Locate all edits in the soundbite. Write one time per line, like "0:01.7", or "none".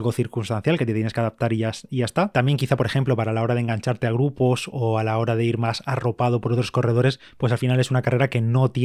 none